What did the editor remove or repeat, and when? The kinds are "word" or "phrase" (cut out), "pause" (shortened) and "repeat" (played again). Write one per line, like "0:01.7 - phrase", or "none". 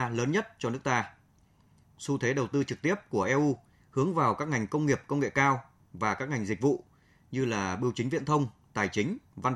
none